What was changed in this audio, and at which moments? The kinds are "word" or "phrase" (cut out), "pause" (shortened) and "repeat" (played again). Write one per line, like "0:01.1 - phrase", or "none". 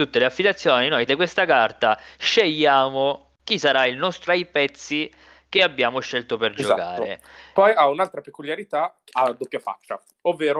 0:01.1 - word
0:04.3 - phrase
0:09.1 - phrase